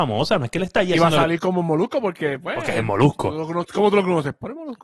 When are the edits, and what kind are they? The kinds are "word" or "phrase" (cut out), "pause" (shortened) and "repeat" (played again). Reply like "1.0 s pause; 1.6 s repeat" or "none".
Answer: none